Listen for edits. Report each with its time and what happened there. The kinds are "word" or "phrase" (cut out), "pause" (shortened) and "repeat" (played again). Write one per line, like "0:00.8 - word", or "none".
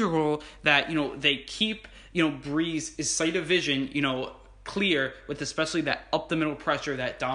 none